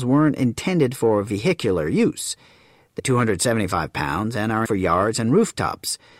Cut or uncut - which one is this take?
cut